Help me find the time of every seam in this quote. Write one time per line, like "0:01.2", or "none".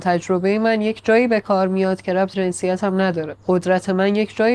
0:02.3
0:03.4